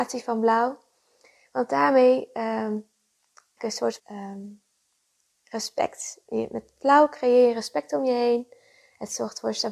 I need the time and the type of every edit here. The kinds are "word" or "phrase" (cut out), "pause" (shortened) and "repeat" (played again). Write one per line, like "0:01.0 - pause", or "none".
0:03.6 - phrase
0:04.0 - word